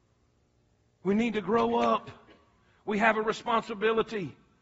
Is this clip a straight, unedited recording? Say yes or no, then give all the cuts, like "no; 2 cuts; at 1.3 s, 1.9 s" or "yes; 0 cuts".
yes; 0 cuts